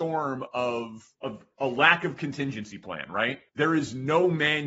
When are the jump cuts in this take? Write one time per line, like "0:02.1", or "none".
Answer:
0:01.1
0:03.5

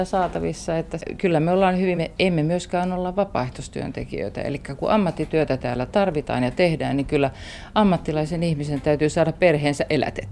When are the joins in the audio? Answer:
0:01.9

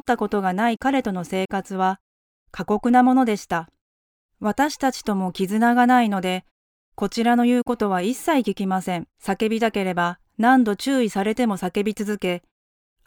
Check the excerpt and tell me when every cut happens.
0:04.0
0:09.1

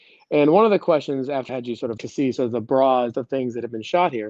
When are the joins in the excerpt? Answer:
0:01.5
0:02.0
0:03.1

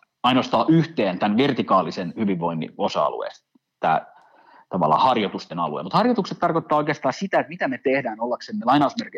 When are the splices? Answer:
none

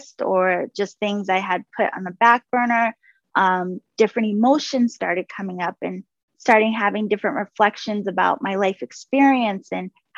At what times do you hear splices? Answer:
none

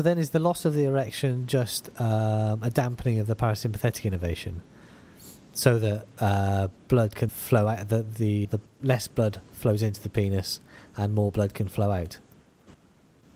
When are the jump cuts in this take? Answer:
0:07.3
0:08.4

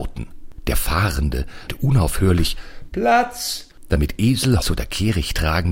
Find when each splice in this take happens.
0:01.7
0:02.9
0:04.6

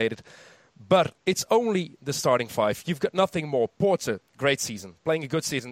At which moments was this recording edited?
0:01.2
0:04.3

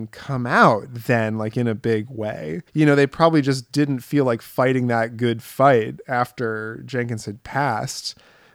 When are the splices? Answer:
0:02.7

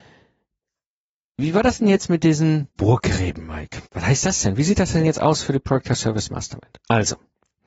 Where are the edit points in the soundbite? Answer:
0:02.7
0:03.9

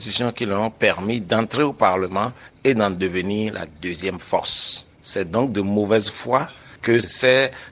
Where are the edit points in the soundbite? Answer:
0:04.9

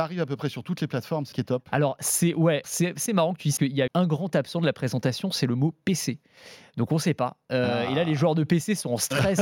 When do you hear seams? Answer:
0:01.3
0:02.6
0:03.1
0:03.6
0:03.9

